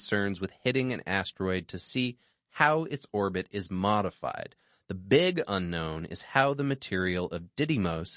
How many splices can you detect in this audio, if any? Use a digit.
0